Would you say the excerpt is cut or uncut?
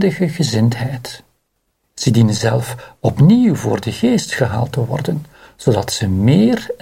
uncut